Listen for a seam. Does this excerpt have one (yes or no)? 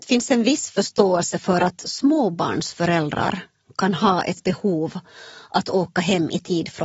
no